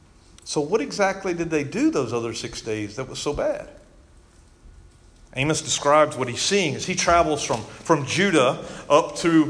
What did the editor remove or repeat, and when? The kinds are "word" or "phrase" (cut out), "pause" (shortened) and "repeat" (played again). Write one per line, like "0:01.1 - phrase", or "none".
none